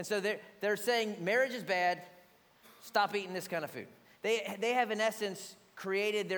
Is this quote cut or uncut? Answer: uncut